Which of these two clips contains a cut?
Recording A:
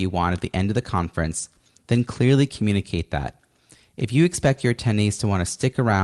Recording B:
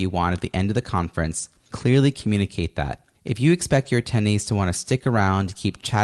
B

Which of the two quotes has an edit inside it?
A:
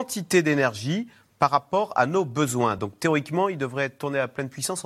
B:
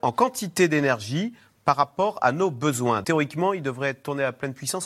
B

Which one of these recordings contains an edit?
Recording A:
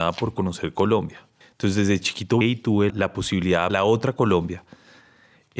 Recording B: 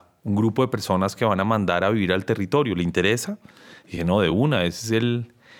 A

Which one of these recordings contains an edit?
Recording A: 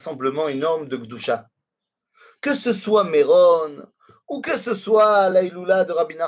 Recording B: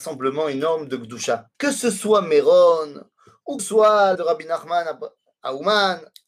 B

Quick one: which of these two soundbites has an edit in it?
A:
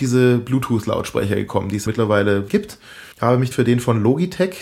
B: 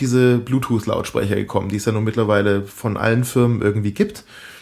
A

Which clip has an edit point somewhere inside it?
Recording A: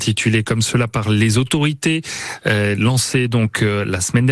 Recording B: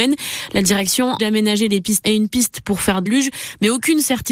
B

